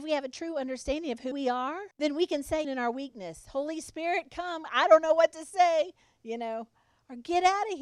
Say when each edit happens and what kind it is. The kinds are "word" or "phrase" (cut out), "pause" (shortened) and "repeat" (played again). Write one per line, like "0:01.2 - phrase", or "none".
0:01.3 - phrase
0:01.9 - pause
0:02.6 - word